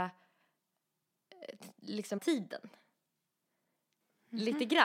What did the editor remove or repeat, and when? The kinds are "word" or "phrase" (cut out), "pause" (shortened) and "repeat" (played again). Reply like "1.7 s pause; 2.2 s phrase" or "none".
2.2 s phrase